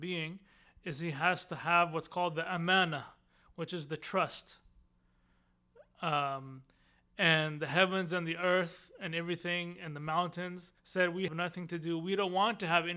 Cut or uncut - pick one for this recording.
cut